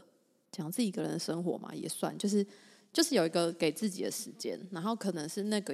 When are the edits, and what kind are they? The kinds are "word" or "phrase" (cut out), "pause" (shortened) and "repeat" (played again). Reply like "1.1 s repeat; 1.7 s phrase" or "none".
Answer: none